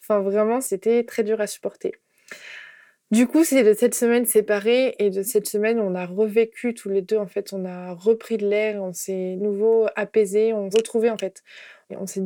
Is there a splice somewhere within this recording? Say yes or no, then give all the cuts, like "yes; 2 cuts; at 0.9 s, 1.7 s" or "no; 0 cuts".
yes; 3 cuts; at 1.1 s, 9.4 s, 10.7 s